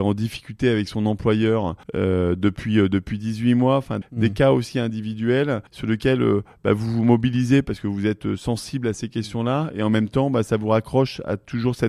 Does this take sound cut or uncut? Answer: cut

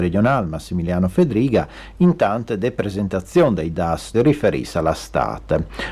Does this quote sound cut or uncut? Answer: cut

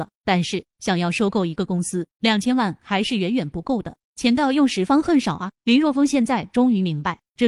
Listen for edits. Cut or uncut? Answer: cut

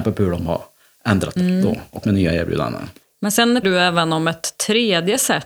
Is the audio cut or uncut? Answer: cut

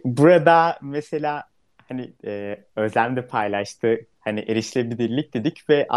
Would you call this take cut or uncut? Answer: cut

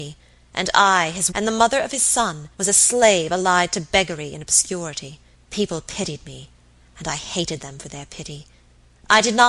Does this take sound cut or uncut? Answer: cut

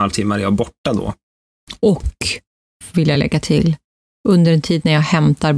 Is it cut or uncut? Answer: uncut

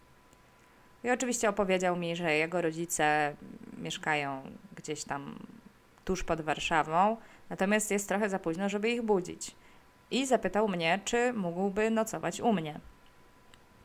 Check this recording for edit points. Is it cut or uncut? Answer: uncut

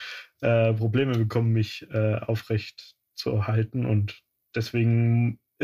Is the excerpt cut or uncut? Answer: uncut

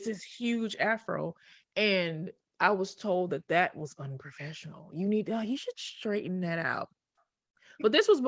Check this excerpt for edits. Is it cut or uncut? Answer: uncut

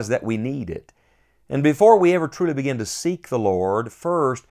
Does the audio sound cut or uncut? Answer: uncut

